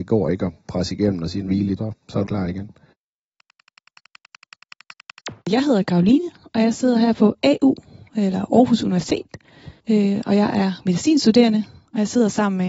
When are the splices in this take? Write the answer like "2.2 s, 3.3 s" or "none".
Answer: 1.5 s, 1.8 s, 2.3 s, 5.4 s, 9.8 s